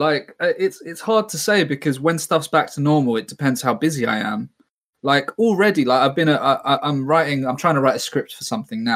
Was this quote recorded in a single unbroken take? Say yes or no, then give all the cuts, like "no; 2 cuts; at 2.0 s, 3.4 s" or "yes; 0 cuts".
yes; 0 cuts